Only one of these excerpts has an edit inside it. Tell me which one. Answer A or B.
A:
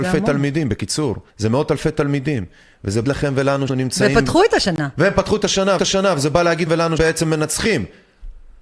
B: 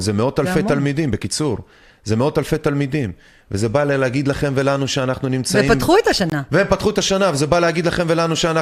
A